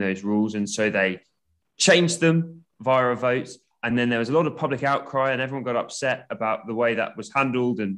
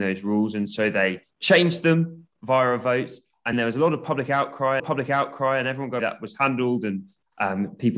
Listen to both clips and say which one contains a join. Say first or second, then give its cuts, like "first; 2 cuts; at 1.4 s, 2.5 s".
second; 4 cuts; at 1.3 s, 3.5 s, 4.8 s, 6.0 s